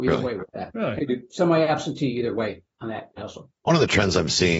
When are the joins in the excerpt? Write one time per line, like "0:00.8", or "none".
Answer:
0:01.0
0:03.2
0:03.6